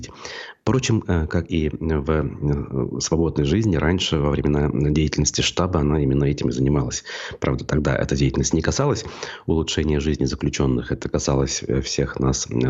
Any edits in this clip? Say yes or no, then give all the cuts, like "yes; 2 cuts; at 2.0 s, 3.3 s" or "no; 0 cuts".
no; 0 cuts